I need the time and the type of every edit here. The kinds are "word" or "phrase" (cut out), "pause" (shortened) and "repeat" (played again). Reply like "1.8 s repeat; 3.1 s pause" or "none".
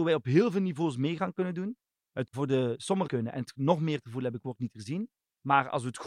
2.3 s phrase; 3.1 s phrase

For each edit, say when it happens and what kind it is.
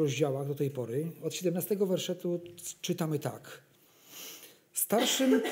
none

